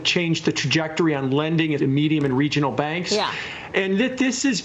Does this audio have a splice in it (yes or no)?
yes